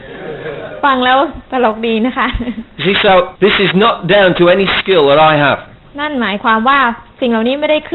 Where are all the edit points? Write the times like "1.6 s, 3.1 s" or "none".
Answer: 1.4 s, 3.4 s, 5.8 s